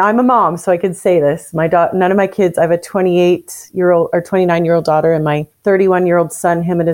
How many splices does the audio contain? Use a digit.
1